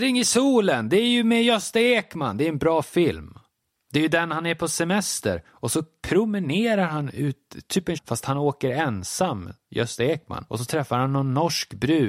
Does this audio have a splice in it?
yes; 1 cut; at 8.0 s

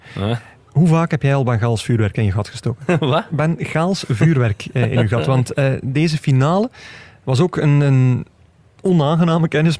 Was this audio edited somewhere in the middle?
no; 0 cuts

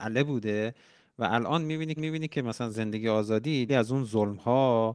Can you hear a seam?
yes; 3 cuts; at 2.0 s, 2.7 s, 3.7 s

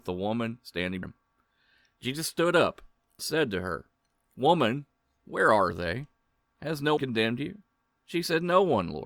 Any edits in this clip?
yes; 3 cuts; at 1.0 s, 3.2 s, 7.0 s

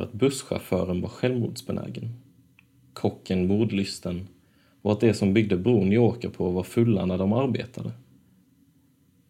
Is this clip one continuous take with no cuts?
yes; 0 cuts

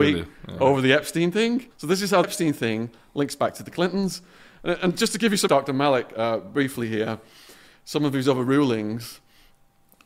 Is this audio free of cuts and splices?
no; 3 cuts; at 1.7 s, 2.2 s, 5.5 s

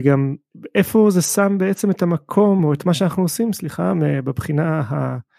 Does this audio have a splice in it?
no; 0 cuts

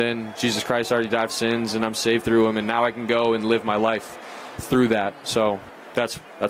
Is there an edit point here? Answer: yes; 2 cuts; at 1.3 s, 4.6 s

